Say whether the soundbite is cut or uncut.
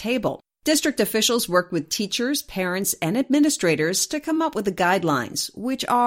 uncut